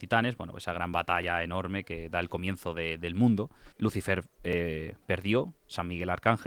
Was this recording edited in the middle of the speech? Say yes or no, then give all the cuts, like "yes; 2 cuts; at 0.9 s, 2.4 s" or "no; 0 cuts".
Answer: yes; 1 cut; at 3.7 s